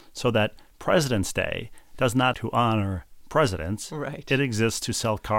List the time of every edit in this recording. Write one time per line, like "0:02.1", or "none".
0:02.3